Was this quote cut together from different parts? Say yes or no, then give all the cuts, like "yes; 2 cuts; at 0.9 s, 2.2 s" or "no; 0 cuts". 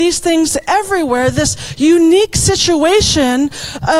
no; 0 cuts